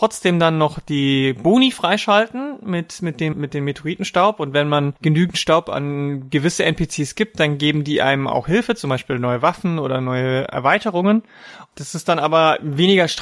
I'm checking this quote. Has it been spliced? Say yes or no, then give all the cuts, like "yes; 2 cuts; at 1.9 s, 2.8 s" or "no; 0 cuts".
yes; 2 cuts; at 3.3 s, 5.0 s